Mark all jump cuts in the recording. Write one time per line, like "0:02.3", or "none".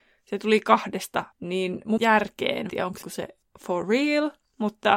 0:01.3
0:02.0
0:02.7
0:03.0
0:03.4